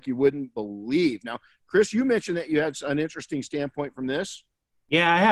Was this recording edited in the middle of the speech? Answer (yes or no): no